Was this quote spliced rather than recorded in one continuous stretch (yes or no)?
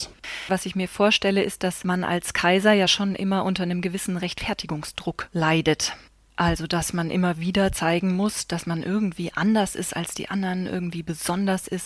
no